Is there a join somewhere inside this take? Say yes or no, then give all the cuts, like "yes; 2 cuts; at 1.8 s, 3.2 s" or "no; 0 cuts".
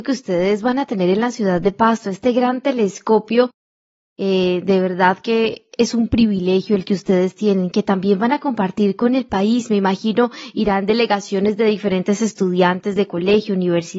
no; 0 cuts